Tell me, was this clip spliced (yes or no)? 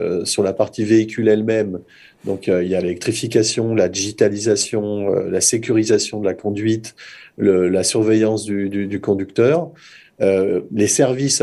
no